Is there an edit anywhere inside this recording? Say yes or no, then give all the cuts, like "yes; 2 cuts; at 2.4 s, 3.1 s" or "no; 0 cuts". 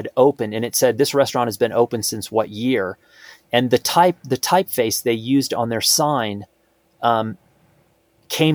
no; 0 cuts